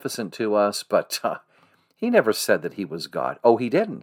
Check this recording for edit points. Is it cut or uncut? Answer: uncut